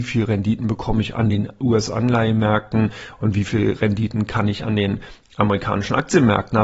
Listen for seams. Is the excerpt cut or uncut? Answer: uncut